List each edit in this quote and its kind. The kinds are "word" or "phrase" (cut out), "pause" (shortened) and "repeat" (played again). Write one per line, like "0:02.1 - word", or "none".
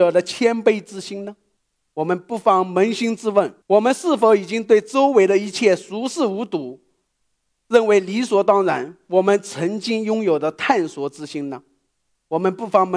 0:03.6 - pause